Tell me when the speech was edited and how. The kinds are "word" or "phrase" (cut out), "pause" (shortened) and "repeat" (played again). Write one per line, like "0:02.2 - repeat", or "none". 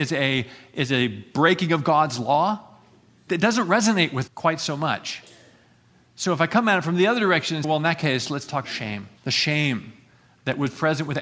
0:03.3 - word
0:04.3 - word
0:07.6 - word
0:08.6 - word
0:09.2 - pause